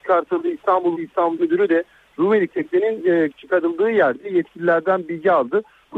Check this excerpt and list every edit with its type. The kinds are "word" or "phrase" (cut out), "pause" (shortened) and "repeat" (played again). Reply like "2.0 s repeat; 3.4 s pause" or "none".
0.9 s word; 1.4 s word; 2.5 s word; 3.3 s word